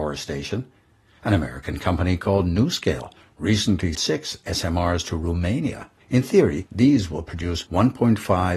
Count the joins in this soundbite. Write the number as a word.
two